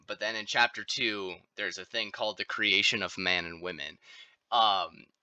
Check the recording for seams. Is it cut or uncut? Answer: uncut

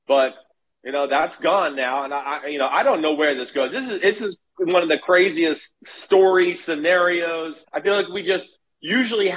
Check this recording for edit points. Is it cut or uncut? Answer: cut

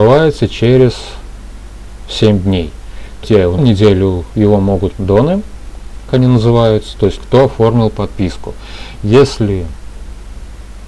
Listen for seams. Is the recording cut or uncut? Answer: cut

